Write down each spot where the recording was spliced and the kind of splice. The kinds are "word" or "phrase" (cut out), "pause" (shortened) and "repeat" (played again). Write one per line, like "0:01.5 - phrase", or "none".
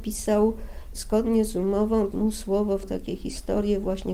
0:02.1 - word
0:02.8 - word